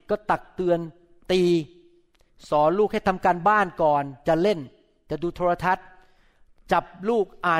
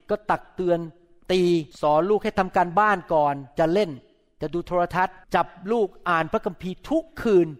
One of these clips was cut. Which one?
second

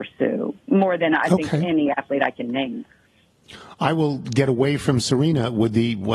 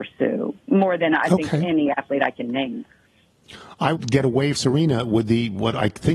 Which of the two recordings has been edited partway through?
second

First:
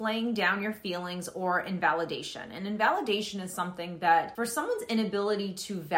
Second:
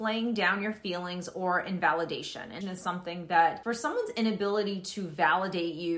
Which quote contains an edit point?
second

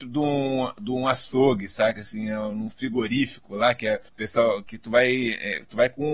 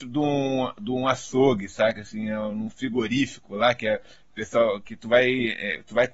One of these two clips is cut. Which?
first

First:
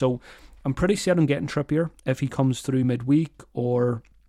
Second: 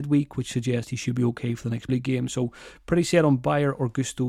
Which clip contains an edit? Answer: second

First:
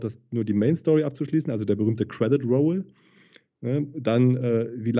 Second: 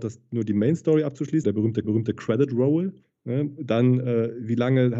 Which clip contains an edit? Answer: second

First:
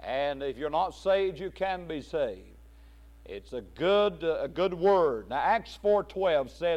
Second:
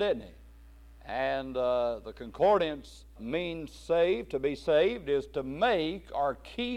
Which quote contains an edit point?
second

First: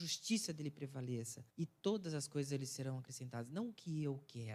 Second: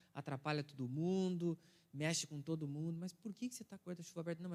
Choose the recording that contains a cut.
first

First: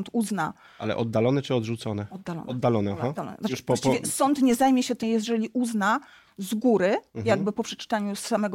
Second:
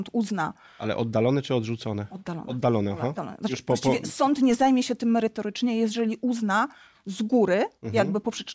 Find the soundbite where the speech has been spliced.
first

